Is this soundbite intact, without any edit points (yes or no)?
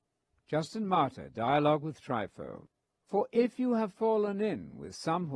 yes